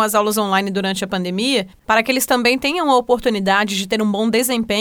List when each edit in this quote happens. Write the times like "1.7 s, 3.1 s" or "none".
none